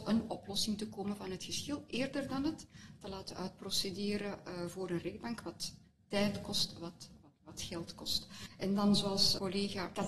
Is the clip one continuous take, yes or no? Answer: yes